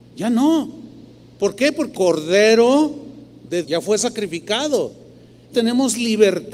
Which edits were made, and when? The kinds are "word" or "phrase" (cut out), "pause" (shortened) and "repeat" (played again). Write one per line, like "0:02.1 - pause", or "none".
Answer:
0:01.2 - pause
0:01.9 - word
0:03.6 - word
0:05.5 - word